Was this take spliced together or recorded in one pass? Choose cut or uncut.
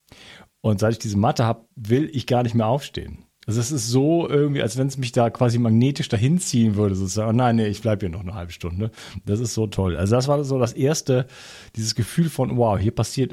uncut